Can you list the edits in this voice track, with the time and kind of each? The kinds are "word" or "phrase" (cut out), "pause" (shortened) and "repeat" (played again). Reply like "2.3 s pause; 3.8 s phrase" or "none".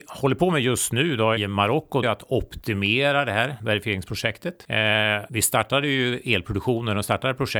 1.4 s word; 2.0 s word

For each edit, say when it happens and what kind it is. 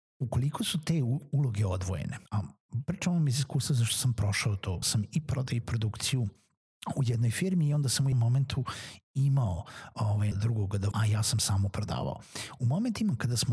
2.3 s pause; 4.8 s word; 8.1 s word; 10.3 s word; 10.9 s phrase

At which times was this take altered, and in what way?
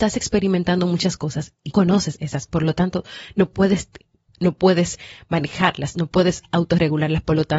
1.7 s word; 2.5 s word; 4.3 s word

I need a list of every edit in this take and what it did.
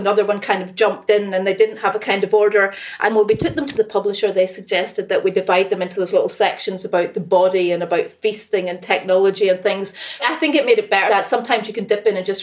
3.1 s word; 10.2 s word; 11.1 s word

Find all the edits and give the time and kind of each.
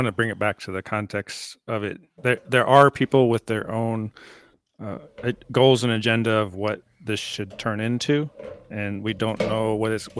none

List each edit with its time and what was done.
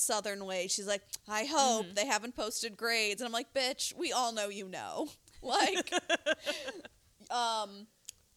none

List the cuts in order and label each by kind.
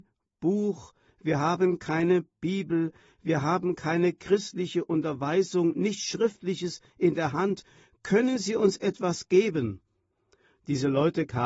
none

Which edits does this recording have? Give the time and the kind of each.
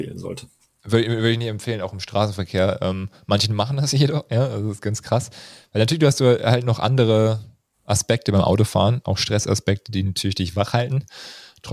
none

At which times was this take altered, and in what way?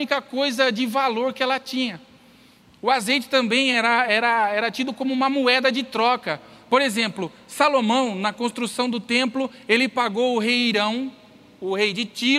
none

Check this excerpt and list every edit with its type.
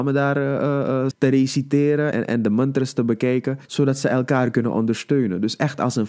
1.1 s word; 2.1 s word; 3.6 s pause

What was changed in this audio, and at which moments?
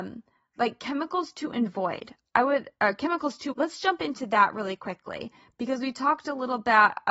3.5 s word

